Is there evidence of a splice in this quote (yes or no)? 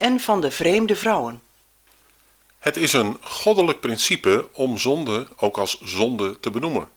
no